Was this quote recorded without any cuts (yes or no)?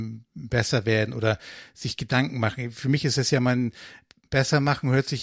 yes